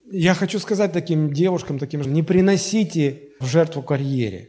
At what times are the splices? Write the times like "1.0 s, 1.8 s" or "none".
2.0 s, 3.4 s